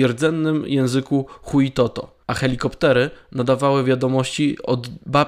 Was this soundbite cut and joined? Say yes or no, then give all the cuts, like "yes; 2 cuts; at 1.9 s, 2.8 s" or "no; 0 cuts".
yes; 1 cut; at 2.2 s